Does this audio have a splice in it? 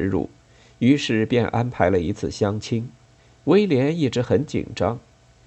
yes; 1 cut; at 3.2 s

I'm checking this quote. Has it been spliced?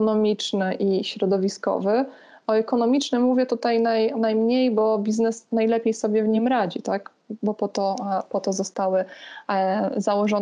no; 0 cuts

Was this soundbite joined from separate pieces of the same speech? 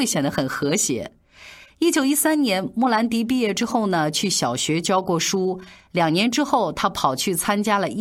no; 0 cuts

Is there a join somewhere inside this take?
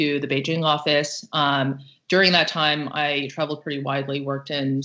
no; 0 cuts

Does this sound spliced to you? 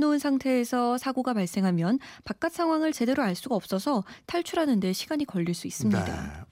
no; 0 cuts

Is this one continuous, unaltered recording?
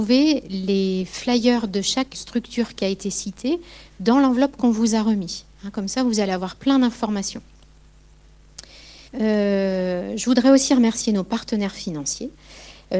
no; 2 cuts; at 2.1 s, 9.1 s

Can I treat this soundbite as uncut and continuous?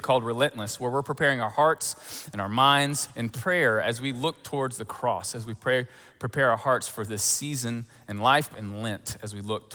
no; 2 cuts; at 3.1 s, 8.5 s

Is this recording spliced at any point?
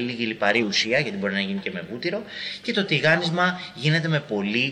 no; 0 cuts

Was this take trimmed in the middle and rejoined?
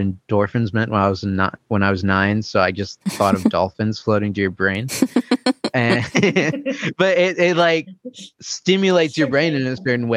no; 0 cuts

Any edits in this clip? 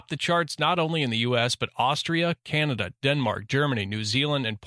no; 0 cuts

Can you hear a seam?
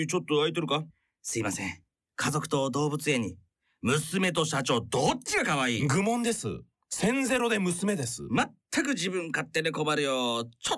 no; 0 cuts

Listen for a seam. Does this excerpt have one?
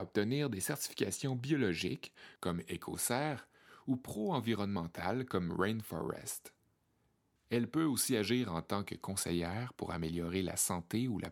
no; 0 cuts

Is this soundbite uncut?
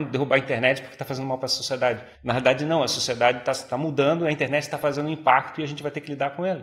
no; 1 cut; at 2.1 s

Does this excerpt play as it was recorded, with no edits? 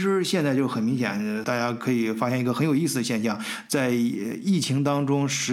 no; 1 cut; at 1.4 s

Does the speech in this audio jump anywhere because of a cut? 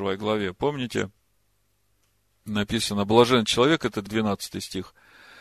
no; 0 cuts

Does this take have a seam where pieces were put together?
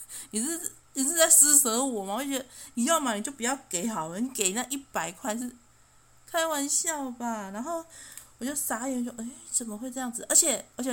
no; 0 cuts

